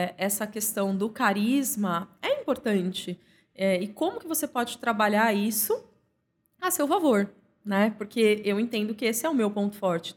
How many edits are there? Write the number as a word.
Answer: zero